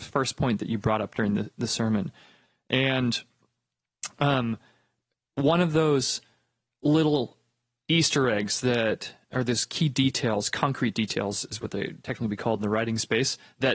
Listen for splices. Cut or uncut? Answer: uncut